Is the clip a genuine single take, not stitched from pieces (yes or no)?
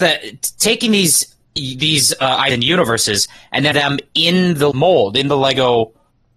no